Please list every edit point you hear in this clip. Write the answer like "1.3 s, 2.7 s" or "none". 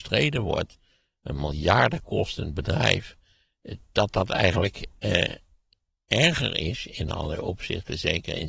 none